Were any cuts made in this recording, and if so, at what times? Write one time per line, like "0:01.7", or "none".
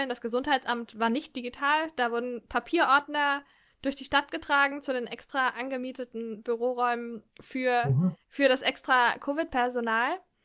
0:08.2